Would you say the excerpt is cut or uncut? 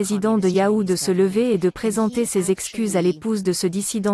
uncut